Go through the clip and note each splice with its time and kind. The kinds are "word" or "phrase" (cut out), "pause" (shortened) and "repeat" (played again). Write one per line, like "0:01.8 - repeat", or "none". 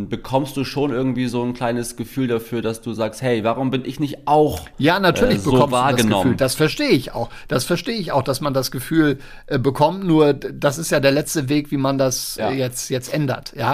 0:12.4 - word